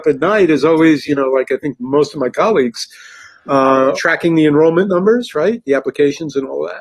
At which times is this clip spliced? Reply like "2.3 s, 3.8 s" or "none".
3.9 s